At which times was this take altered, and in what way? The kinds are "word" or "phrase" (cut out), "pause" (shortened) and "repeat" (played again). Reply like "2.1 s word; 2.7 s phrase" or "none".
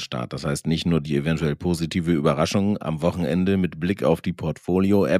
none